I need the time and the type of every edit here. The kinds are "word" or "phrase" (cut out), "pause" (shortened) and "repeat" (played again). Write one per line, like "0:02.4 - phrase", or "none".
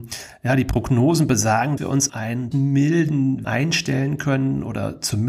0:01.8 - word
0:02.1 - word
0:02.5 - word
0:03.4 - word